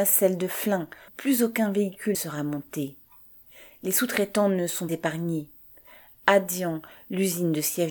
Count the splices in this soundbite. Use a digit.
3